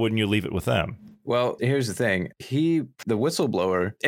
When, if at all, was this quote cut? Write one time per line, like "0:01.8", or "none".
0:01.6
0:03.0

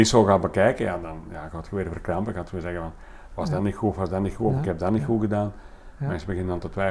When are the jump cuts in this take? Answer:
0:01.0

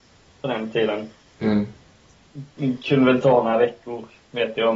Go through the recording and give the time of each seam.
none

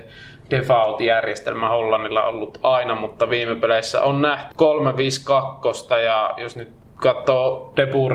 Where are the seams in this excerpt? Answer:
0:04.5

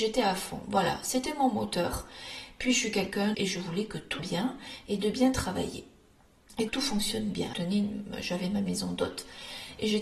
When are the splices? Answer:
0:03.3
0:04.2
0:06.7
0:07.5

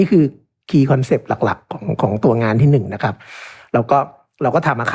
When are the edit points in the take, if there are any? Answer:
none

